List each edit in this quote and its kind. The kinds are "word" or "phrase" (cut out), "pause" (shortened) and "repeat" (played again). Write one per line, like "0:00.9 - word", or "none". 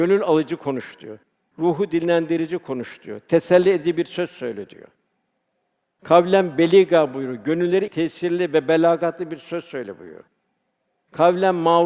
0:07.9 - word